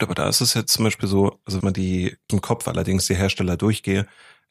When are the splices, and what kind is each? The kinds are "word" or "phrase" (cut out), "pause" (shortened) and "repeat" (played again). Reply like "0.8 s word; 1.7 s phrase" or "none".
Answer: 1.6 s phrase; 2.3 s word